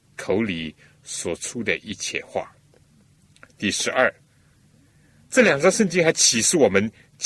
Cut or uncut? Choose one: uncut